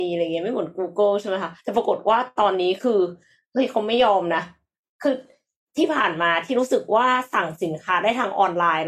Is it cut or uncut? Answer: cut